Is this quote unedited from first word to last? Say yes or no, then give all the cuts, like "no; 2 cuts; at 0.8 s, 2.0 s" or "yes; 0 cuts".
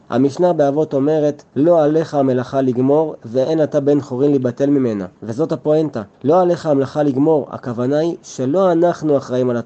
no; 3 cuts; at 1.5 s, 5.2 s, 6.1 s